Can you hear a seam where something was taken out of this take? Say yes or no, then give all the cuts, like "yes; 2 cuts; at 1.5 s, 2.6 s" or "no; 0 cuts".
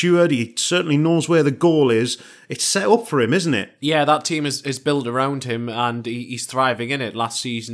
no; 0 cuts